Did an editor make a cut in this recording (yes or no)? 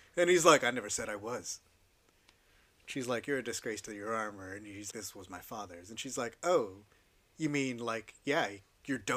yes